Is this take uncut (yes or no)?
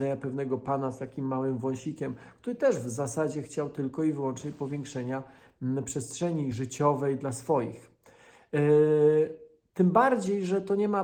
yes